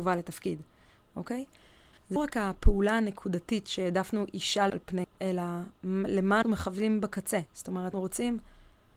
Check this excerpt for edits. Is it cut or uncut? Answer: cut